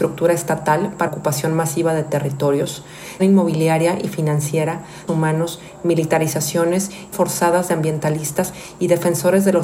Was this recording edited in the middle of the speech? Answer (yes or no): yes